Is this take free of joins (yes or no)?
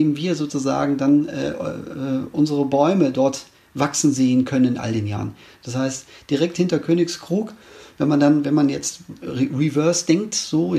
yes